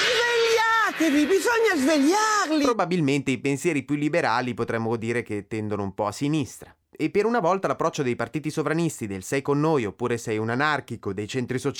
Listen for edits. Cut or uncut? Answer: uncut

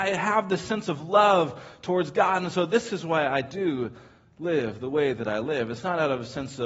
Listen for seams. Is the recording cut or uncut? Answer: uncut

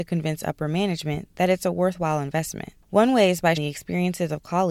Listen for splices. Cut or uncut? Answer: cut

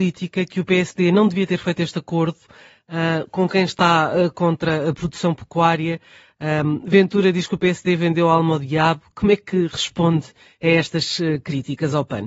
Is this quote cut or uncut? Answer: uncut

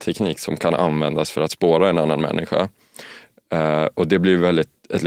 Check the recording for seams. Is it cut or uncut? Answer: uncut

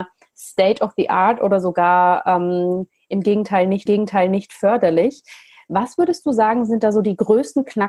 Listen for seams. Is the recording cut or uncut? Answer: cut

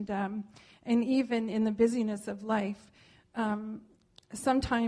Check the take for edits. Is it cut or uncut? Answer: uncut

